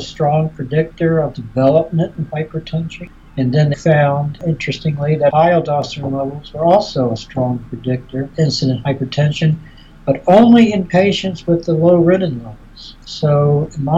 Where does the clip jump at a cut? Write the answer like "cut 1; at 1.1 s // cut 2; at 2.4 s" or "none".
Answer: cut 1; at 3.7 s // cut 2; at 8.3 s